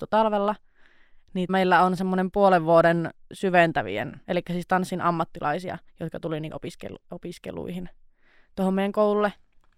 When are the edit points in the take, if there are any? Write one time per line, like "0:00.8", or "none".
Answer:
0:01.5
0:04.2
0:05.9
0:06.5